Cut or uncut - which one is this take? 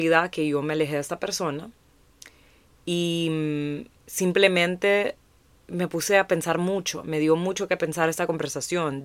cut